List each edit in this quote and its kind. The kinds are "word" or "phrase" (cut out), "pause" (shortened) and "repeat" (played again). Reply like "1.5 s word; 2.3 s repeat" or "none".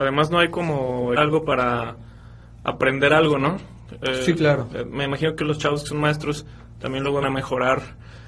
1.2 s word; 7.2 s word